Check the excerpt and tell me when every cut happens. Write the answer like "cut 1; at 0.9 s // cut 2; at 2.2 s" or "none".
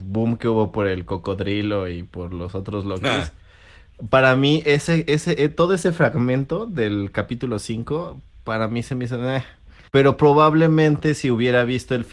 cut 1; at 9.9 s